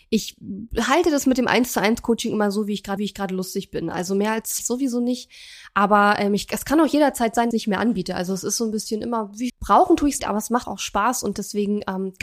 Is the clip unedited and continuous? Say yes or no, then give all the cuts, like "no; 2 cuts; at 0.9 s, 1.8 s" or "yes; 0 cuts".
no; 6 cuts; at 3.0 s, 4.6 s, 7.5 s, 9.5 s, 10.2 s, 10.6 s